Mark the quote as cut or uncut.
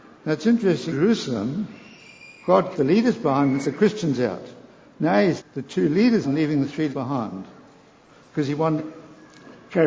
cut